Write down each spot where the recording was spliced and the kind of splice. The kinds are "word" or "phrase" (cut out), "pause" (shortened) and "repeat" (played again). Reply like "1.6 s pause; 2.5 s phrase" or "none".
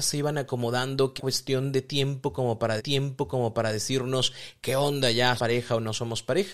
1.2 s word; 2.8 s repeat; 5.4 s word